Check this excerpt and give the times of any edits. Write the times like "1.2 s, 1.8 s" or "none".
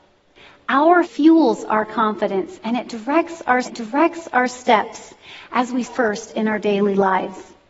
1.0 s, 3.6 s, 5.8 s